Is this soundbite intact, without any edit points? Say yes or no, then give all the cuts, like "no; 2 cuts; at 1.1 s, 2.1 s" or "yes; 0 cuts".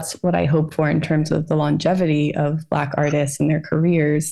yes; 0 cuts